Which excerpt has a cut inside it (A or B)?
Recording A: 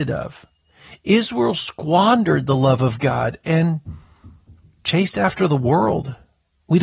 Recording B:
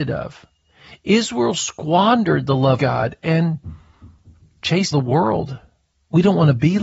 B